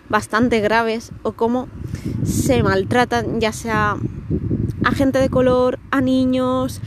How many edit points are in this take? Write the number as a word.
zero